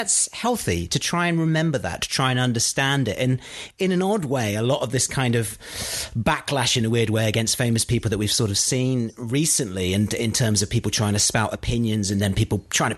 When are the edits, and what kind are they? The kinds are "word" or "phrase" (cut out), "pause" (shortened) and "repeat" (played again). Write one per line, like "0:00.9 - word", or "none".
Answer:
none